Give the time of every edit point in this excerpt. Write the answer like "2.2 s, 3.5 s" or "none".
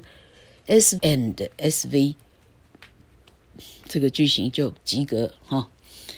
1.0 s, 4.8 s